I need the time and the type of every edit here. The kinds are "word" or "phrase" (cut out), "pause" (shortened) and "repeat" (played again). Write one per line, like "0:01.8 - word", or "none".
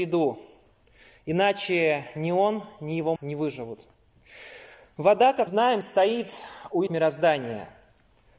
0:03.2 - word
0:05.5 - word
0:06.9 - word